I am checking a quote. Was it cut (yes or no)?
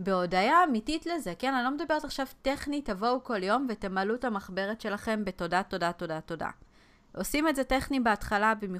no